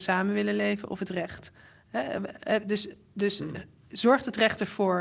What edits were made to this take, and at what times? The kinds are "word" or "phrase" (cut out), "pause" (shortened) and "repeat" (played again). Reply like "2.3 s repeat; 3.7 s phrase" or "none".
none